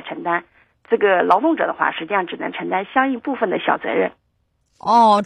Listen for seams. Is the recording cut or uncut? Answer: uncut